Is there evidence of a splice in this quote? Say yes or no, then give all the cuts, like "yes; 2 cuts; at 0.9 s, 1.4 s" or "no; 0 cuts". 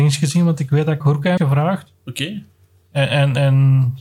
yes; 2 cuts; at 1.0 s, 1.4 s